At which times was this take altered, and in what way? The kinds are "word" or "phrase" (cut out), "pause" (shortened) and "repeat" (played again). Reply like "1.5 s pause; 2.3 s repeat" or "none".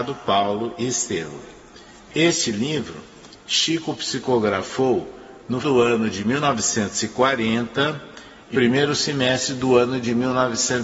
5.6 s word; 8.5 s word